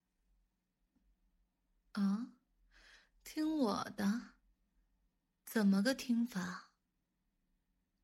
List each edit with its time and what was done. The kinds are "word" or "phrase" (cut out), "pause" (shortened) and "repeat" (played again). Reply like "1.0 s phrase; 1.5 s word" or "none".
none